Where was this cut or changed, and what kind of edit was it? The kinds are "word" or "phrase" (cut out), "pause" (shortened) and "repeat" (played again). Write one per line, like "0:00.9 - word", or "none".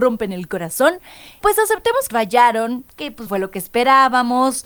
0:01.4 - word
0:02.1 - word
0:03.3 - word